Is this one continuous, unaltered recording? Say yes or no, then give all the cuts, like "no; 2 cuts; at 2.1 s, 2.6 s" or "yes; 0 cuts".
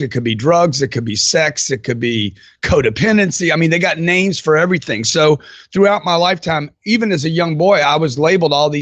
yes; 0 cuts